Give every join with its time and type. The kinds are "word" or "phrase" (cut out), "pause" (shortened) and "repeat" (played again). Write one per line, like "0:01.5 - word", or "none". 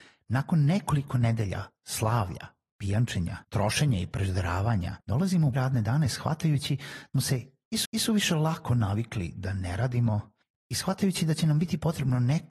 0:03.4 - pause
0:05.0 - pause
0:05.5 - word
0:07.1 - word
0:07.8 - repeat
0:10.4 - pause